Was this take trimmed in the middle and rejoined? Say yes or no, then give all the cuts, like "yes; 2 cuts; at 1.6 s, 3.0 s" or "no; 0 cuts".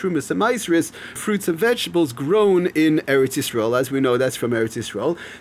yes; 1 cut; at 1.2 s